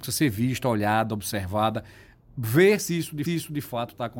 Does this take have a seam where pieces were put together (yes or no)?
yes